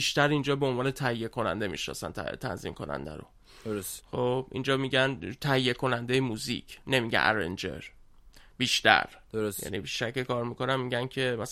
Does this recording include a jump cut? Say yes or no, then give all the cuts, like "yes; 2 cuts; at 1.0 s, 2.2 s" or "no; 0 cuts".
no; 0 cuts